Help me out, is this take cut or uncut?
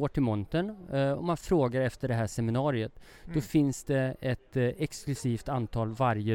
uncut